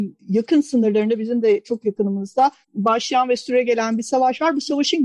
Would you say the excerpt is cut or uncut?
cut